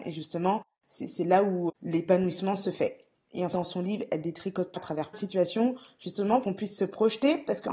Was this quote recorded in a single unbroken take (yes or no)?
no